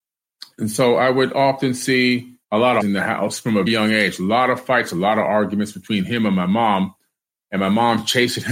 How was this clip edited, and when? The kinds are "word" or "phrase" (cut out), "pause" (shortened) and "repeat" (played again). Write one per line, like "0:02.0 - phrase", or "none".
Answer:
0:02.4 - pause
0:02.8 - word
0:03.7 - word